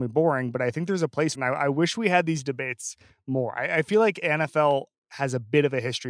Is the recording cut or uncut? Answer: cut